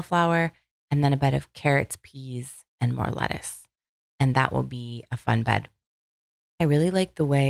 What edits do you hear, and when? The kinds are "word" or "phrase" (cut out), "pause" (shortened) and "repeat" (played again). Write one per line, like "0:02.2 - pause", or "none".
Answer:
0:02.7 - pause